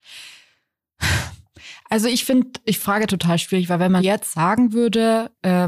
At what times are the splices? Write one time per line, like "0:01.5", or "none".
0:02.8
0:04.0